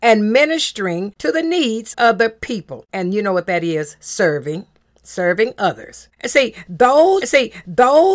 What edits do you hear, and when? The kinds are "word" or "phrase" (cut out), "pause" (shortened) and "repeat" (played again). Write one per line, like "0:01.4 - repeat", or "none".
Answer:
0:01.9 - word
0:06.1 - pause
0:07.2 - repeat